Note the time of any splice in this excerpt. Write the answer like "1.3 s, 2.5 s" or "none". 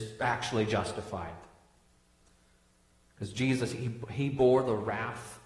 none